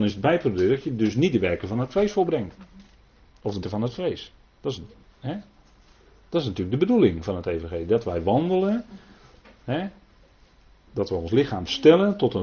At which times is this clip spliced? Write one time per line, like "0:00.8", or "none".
0:03.6